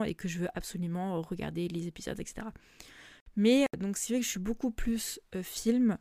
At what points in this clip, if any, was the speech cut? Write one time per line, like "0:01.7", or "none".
none